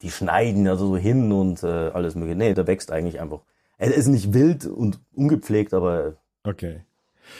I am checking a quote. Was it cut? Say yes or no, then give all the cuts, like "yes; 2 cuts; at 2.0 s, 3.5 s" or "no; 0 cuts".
yes; 1 cut; at 2.5 s